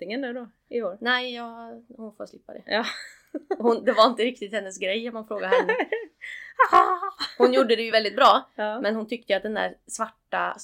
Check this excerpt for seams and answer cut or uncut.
uncut